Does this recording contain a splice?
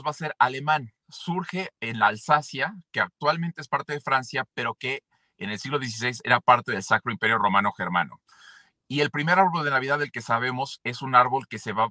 no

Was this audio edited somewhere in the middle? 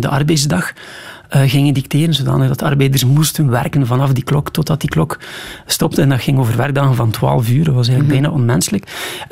no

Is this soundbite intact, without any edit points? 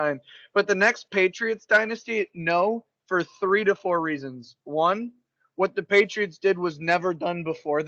yes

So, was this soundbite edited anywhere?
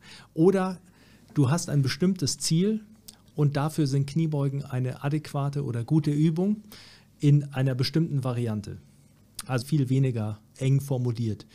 yes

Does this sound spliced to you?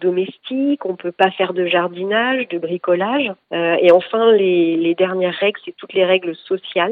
no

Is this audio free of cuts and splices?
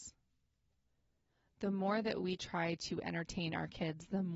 yes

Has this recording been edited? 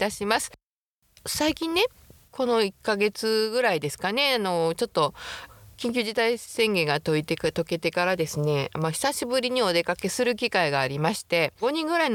no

